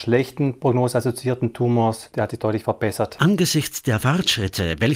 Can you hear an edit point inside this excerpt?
no; 0 cuts

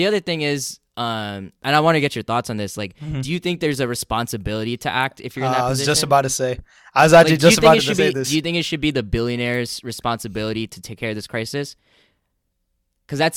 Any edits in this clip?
no; 0 cuts

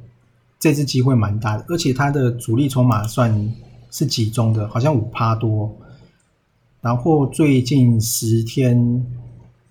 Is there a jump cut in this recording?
no; 0 cuts

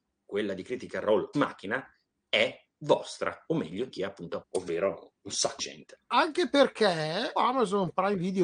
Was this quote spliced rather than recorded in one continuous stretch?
yes; 6 cuts; at 1.3 s, 3.9 s, 4.4 s, 5.6 s, 6.0 s, 7.4 s

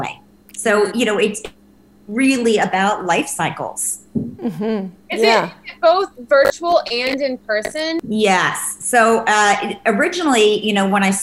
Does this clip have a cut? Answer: no; 0 cuts

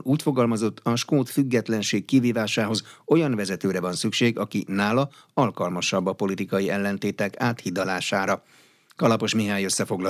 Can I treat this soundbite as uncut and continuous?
yes; 0 cuts

